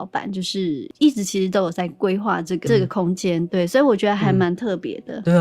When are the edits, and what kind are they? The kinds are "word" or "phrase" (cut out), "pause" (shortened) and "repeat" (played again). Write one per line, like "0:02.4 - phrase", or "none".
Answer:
0:02.7 - word